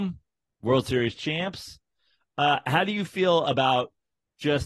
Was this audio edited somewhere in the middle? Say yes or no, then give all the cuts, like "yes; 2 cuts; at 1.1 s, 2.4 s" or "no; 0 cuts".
no; 0 cuts